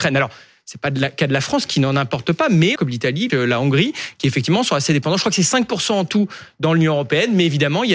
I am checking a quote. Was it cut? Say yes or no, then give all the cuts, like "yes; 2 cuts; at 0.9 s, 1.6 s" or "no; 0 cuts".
yes; 2 cuts; at 2.8 s, 3.3 s